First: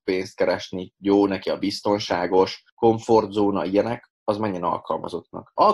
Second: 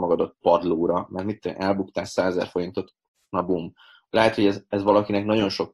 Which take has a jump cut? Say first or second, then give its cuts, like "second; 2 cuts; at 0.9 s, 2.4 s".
first; 1 cut; at 2.7 s